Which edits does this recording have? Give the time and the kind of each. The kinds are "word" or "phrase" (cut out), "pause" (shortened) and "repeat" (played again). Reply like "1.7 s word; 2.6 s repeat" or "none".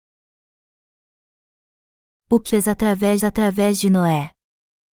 2.5 s word; 3.2 s repeat